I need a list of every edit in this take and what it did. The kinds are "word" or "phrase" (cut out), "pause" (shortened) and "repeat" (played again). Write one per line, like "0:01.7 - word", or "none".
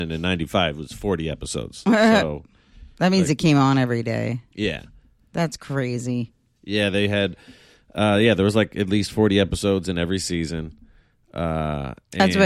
none

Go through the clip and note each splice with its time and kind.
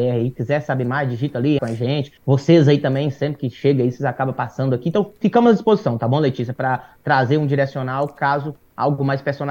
0:01.6 - phrase
0:02.2 - pause

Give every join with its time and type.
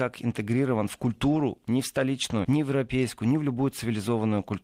0:02.4 - phrase

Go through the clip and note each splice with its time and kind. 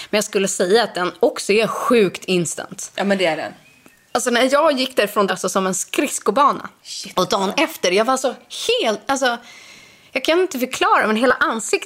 0:05.3 - phrase

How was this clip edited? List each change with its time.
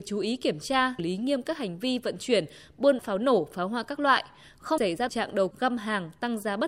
0:01.0 - word
0:03.0 - word
0:04.8 - word
0:05.1 - word
0:05.5 - word

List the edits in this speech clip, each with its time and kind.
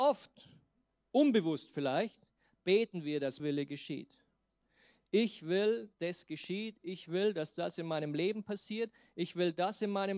0:03.4 - word
0:06.0 - word

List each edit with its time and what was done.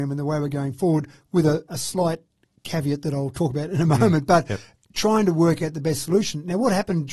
none

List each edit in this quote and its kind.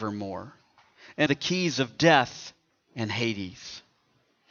0:01.3 - phrase
0:02.7 - pause

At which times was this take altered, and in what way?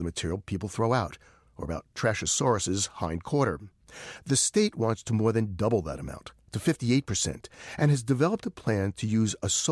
none

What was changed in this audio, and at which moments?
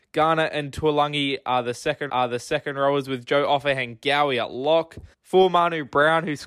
0:02.1 - repeat
0:05.1 - pause

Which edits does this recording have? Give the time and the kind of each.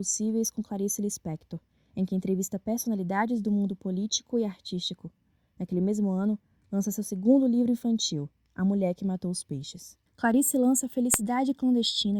0:10.1 - pause

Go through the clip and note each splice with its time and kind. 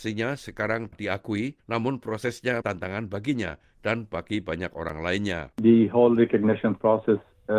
0:00.9 - word
0:01.6 - pause
0:02.6 - word
0:05.5 - pause

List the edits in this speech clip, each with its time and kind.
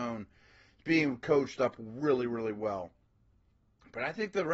none

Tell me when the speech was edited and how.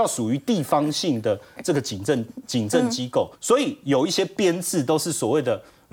0:03.3 - pause

